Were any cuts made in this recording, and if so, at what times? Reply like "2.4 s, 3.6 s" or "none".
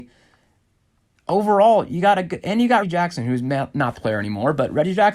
2.8 s, 3.9 s